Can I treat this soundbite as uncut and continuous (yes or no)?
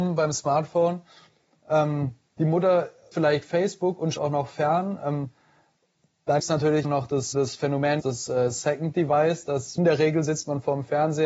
no